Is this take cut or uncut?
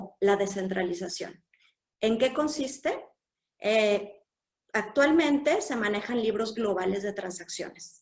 uncut